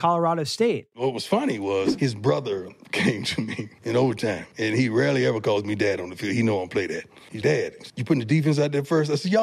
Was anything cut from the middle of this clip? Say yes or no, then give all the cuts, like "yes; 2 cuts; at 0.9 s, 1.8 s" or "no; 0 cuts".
yes; 1 cut; at 7.4 s